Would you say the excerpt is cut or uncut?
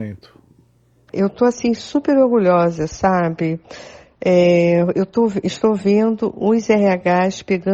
uncut